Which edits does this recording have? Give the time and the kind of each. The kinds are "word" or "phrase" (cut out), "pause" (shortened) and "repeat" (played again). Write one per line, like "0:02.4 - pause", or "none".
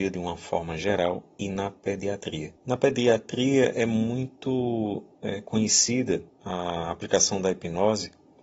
0:02.6 - pause
0:06.3 - pause